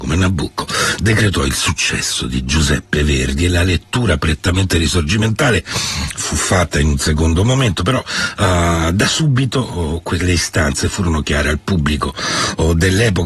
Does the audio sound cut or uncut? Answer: uncut